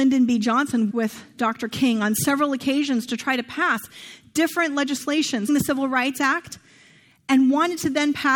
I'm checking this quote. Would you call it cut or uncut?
cut